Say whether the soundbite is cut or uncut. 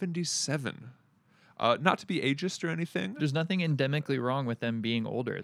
uncut